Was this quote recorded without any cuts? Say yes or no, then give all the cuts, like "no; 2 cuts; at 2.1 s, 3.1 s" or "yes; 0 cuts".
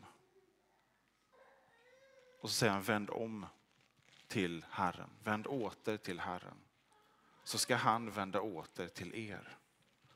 yes; 0 cuts